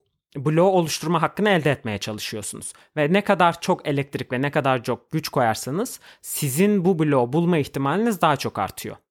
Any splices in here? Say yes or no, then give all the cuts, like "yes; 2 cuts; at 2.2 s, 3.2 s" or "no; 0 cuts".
no; 0 cuts